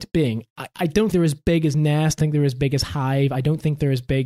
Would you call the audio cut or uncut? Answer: cut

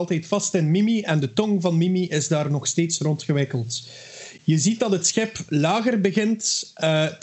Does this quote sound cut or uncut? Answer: uncut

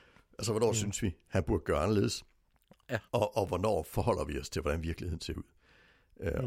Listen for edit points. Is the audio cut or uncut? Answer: cut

